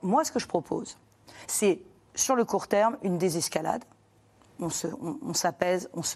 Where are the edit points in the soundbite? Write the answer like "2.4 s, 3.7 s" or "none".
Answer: none